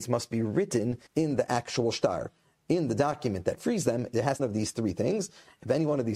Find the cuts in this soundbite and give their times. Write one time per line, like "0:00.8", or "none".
0:01.1
0:04.4